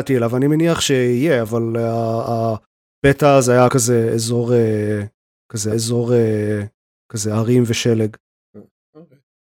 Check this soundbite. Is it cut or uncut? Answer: cut